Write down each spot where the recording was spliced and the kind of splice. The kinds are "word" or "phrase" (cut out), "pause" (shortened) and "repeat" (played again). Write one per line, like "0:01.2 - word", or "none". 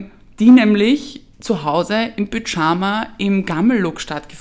0:01.3 - pause